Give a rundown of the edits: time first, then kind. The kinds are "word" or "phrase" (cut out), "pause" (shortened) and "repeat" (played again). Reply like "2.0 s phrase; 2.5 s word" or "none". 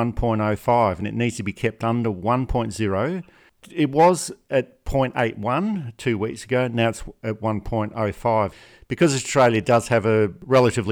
none